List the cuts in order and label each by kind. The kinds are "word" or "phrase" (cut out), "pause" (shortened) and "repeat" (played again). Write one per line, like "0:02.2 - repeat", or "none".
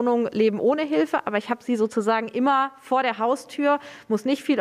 none